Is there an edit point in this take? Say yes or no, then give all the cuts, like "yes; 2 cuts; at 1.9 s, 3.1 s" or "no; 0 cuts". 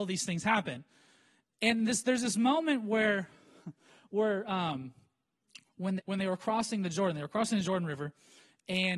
yes; 1 cut; at 6.0 s